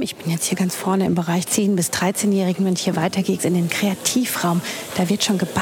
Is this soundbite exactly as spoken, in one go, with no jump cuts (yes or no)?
no